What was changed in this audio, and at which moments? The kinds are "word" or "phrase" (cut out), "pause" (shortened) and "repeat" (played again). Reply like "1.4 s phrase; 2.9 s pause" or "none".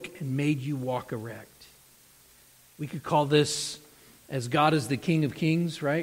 none

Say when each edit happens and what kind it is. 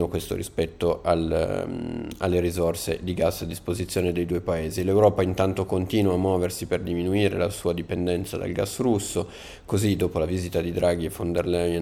none

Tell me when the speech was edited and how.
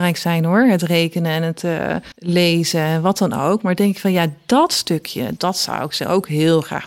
2.1 s pause; 5.4 s word

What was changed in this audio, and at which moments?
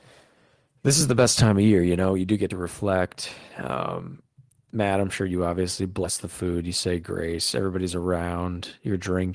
none

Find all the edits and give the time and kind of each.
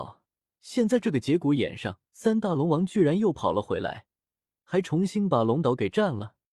2.1 s pause

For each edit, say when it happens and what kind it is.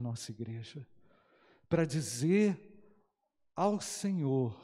none

